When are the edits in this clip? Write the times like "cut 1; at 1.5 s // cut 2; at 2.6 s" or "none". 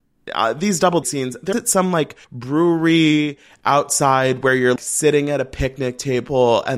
cut 1; at 1.0 s // cut 2; at 1.5 s // cut 3; at 2.2 s // cut 4; at 4.8 s